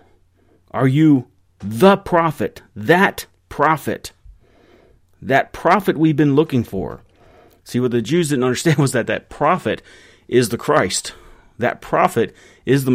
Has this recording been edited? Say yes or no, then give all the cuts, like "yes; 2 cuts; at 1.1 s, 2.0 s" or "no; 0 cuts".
no; 0 cuts